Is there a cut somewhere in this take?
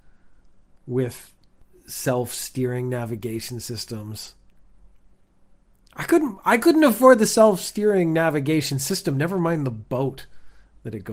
no; 0 cuts

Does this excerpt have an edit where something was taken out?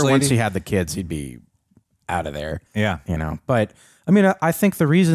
yes; 1 cut; at 2.7 s

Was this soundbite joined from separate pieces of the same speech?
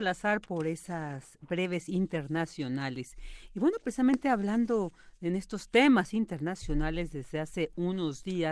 no; 0 cuts

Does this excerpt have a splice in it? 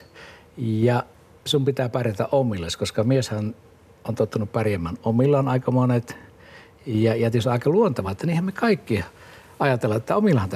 no; 0 cuts

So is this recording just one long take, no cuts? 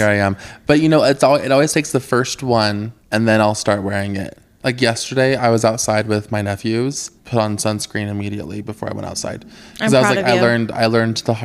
no; 2 cuts; at 3.0 s, 7.2 s

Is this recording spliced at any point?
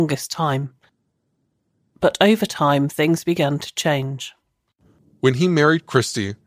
no; 0 cuts

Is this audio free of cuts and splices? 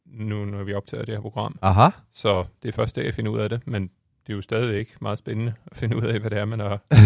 yes; 0 cuts

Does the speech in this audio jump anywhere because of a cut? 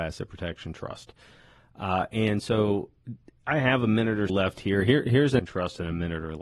yes; 2 cuts; at 4.3 s, 5.4 s

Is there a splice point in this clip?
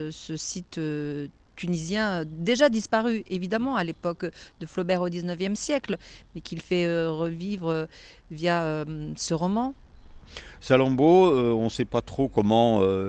no; 0 cuts

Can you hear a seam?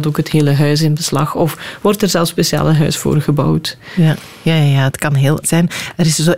yes; 1 cut; at 5.4 s

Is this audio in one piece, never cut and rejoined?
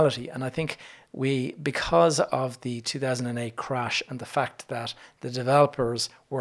yes; 0 cuts

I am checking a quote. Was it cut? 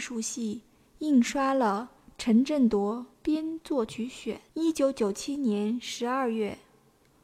yes; 3 cuts; at 2.0 s, 3.1 s, 4.5 s

